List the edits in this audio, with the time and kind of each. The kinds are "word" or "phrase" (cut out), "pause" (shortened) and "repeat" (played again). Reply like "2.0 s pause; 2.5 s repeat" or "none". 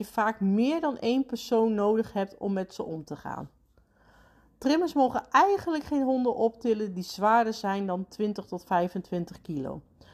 none